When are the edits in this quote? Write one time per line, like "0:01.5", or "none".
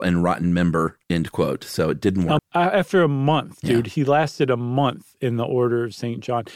0:01.0
0:02.4